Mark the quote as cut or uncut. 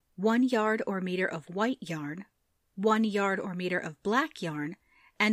uncut